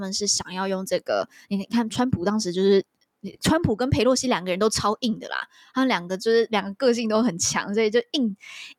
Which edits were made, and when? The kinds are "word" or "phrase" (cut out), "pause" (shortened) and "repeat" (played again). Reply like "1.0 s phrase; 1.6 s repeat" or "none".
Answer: none